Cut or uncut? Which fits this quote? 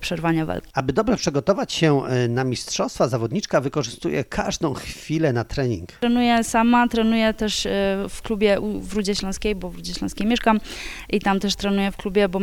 uncut